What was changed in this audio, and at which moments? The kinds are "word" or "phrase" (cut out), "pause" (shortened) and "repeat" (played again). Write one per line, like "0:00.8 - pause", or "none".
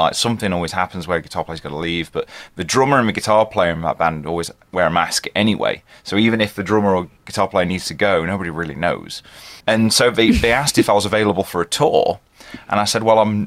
0:07.2 - pause
0:09.6 - pause